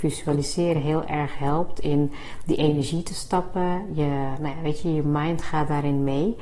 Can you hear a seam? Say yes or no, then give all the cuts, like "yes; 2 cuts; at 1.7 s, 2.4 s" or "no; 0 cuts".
no; 0 cuts